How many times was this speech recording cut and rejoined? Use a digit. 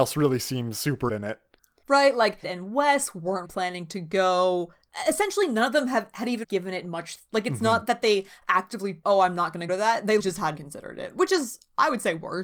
9